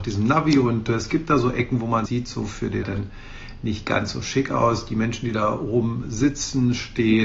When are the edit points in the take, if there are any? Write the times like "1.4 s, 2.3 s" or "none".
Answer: 2.1 s, 2.8 s